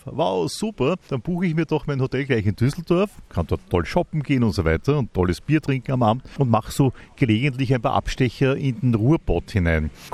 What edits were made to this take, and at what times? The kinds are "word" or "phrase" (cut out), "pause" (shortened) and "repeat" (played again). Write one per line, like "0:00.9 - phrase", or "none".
none